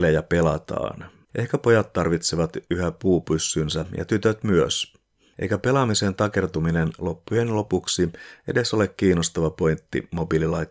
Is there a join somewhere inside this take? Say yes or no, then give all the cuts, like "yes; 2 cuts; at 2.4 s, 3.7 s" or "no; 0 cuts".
no; 0 cuts